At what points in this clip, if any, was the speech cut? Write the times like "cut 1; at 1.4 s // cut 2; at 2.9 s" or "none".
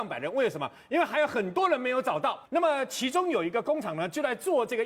cut 1; at 2.5 s